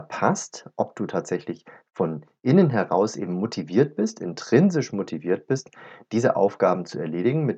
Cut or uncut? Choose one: uncut